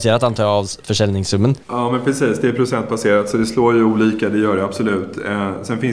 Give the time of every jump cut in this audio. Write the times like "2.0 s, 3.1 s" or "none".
1.6 s